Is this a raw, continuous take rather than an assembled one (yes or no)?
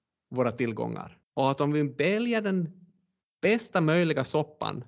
no